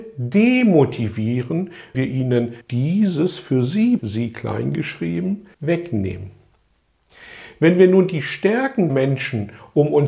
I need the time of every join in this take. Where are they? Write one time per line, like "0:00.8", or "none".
0:01.9
0:02.6
0:04.0
0:05.5
0:08.9